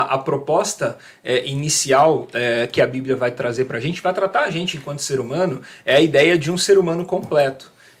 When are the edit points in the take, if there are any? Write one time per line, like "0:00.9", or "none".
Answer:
none